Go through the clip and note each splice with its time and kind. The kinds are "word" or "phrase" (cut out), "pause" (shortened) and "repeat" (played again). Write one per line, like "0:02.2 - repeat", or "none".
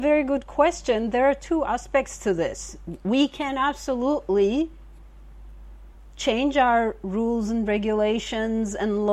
none